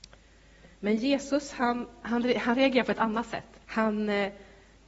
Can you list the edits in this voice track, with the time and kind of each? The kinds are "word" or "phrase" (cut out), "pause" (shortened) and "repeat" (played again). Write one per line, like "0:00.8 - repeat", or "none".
0:03.6 - pause

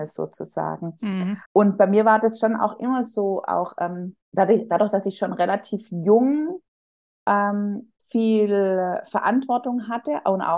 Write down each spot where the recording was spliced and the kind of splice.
0:01.4 - pause
0:04.2 - pause
0:08.0 - pause

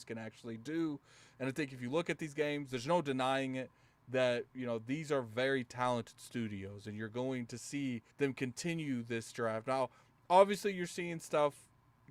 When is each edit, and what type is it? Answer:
0:08.1 - pause

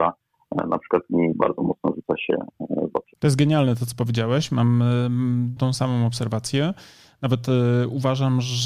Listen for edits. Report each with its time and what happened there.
0:05.6 - word

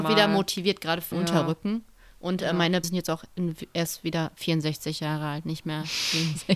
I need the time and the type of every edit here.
0:01.1 - word
0:02.8 - word

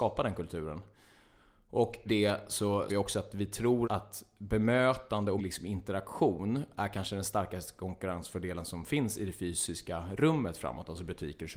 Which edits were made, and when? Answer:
0:02.1 - word
0:02.9 - word
0:03.8 - word
0:05.4 - word

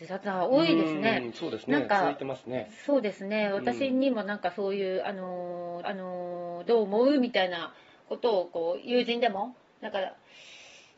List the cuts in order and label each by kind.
0:05.8 - repeat

